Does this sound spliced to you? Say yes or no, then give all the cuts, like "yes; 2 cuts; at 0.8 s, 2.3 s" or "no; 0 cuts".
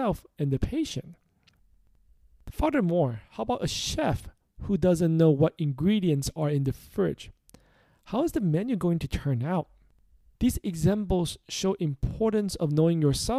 no; 0 cuts